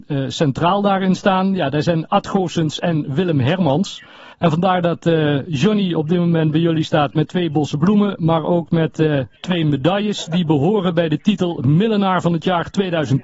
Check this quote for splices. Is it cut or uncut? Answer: cut